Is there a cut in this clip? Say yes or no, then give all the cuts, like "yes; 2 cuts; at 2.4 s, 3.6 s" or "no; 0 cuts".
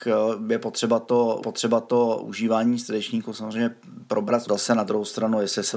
yes; 2 cuts; at 1.4 s, 4.5 s